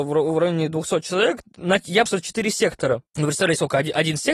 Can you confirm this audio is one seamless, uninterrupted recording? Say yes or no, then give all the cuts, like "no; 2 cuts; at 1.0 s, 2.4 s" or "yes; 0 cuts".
no; 2 cuts; at 2.1 s, 3.1 s